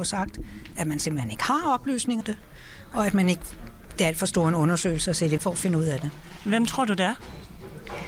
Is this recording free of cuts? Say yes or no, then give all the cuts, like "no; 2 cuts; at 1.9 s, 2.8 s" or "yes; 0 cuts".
no; 2 cuts; at 2.2 s, 5.4 s